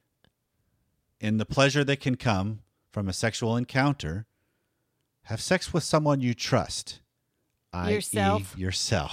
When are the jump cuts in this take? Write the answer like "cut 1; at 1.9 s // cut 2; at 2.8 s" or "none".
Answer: none